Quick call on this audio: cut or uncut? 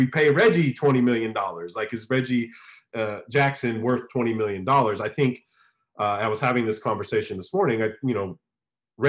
uncut